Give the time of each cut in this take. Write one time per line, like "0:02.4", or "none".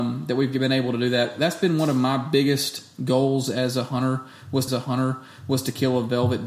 0:04.7